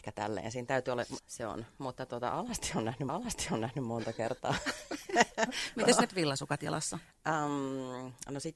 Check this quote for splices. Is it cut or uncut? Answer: cut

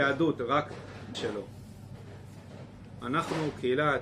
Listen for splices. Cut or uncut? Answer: cut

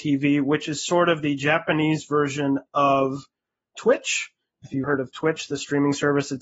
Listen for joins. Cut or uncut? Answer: cut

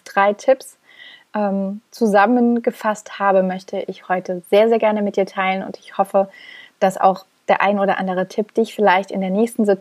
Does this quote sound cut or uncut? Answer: uncut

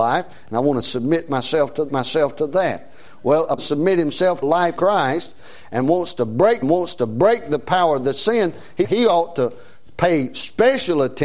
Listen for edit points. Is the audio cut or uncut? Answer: cut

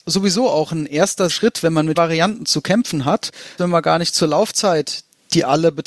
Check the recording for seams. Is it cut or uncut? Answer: cut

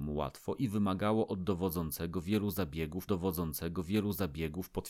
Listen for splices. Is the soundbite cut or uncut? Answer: cut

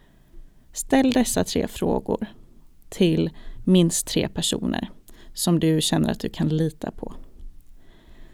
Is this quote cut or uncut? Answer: uncut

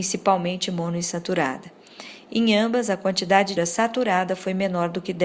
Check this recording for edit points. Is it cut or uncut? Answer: cut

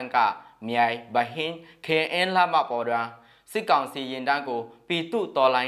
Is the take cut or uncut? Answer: uncut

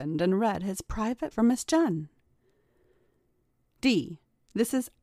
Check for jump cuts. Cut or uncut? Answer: cut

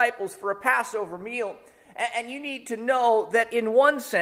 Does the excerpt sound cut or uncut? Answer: uncut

